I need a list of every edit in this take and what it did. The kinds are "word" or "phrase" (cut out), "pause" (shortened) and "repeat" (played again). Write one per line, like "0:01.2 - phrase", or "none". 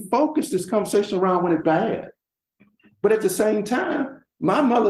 0:01.6 - word

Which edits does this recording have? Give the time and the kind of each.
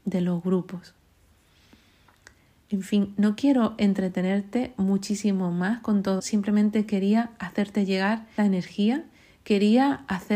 0:06.2 - word
0:08.4 - word

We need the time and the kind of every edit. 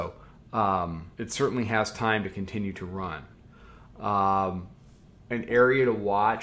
0:01.1 - pause

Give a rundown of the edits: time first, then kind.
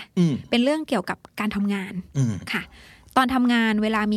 none

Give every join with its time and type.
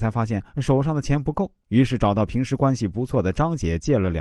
0:01.6 - pause

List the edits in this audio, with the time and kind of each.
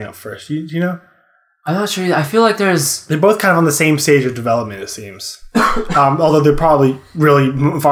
none

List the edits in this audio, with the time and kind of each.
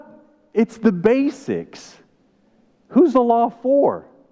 none

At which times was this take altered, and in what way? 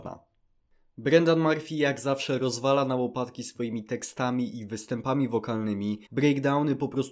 0:06.1 - pause

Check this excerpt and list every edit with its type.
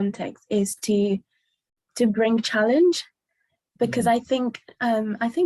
none

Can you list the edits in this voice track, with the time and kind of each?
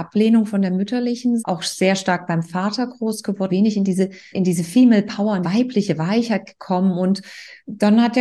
0:01.4 - word
0:03.5 - word
0:04.3 - word
0:05.4 - word

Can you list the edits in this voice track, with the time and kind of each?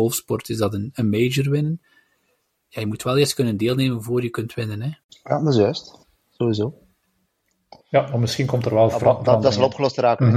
none

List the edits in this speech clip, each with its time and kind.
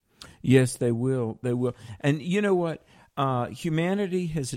none

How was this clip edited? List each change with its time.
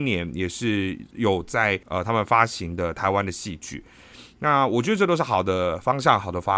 0:01.8 - pause

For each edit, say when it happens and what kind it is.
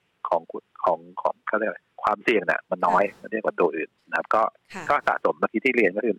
0:01.9 - pause
0:04.0 - pause

